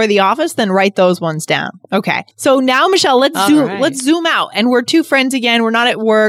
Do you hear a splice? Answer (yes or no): yes